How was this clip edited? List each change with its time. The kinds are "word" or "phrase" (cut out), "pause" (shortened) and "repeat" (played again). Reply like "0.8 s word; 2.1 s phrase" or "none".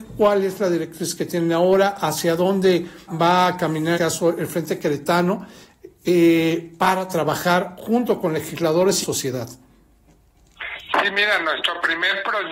3.1 s word; 3.9 s phrase; 9.0 s phrase